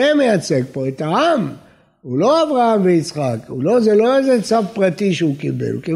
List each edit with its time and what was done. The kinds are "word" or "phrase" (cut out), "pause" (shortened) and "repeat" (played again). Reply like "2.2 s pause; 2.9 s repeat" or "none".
none